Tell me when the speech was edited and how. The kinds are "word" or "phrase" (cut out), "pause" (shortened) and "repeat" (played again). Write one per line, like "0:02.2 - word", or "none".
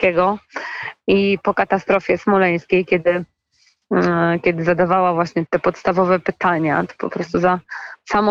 0:05.5 - word